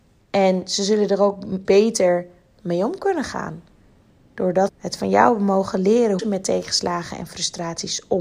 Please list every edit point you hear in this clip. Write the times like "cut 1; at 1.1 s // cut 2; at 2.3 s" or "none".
cut 1; at 1.6 s // cut 2; at 4.7 s // cut 3; at 6.2 s